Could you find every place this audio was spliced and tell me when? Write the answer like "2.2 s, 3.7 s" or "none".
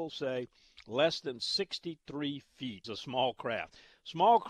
2.8 s